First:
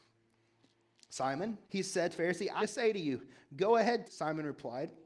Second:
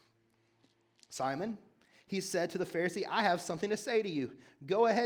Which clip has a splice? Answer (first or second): first